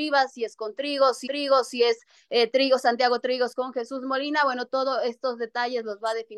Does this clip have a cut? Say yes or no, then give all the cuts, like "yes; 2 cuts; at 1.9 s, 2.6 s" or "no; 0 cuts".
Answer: yes; 1 cut; at 1.3 s